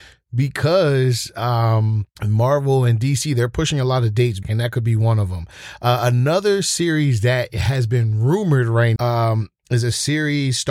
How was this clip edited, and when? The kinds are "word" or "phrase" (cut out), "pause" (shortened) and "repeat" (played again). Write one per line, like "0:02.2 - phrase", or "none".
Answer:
0:02.2 - pause
0:04.4 - word
0:09.0 - word